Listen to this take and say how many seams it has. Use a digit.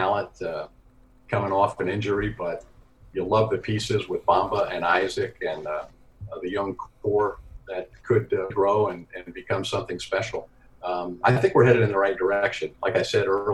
2